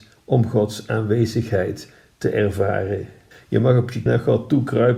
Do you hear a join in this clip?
yes; 2 cuts; at 3.3 s, 4.1 s

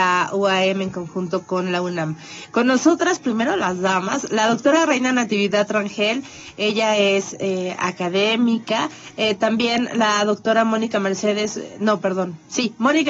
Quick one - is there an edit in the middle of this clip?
no; 0 cuts

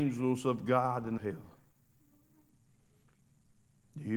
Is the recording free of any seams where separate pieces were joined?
no; 1 cut; at 1.2 s

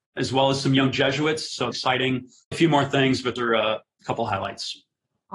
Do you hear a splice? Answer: yes; 3 cuts; at 1.7 s, 2.5 s, 3.4 s

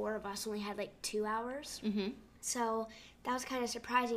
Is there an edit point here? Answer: yes; 1 cut; at 2.3 s

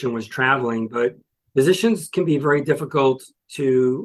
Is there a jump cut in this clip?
no; 0 cuts

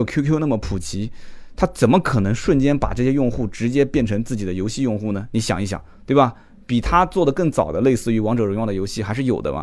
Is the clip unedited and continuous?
yes; 0 cuts

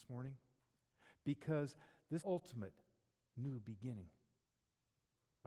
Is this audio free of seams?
no; 1 cut; at 2.2 s

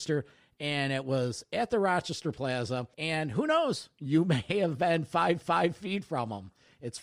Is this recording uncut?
no; 2 cuts; at 2.9 s, 5.4 s

